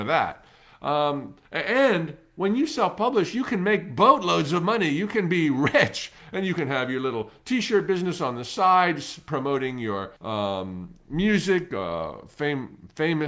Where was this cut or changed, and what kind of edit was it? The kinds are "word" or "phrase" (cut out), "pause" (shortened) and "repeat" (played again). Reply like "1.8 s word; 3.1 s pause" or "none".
1.4 s pause; 10.2 s pause